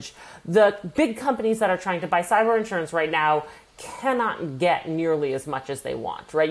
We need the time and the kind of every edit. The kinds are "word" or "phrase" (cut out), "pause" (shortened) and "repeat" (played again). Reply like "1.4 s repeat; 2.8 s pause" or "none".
none